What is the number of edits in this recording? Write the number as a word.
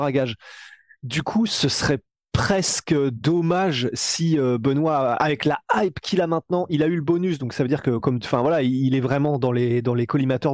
zero